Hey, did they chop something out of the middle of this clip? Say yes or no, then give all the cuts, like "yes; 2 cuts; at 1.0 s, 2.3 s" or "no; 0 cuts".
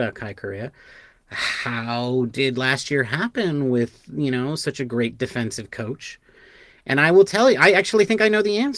no; 0 cuts